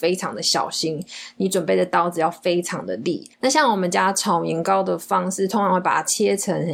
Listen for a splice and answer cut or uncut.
cut